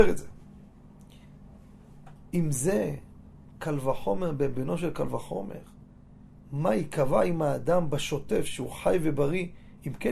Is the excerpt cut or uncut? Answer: uncut